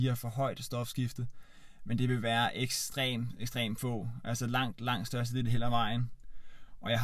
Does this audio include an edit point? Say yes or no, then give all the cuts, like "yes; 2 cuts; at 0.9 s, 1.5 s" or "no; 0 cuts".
no; 0 cuts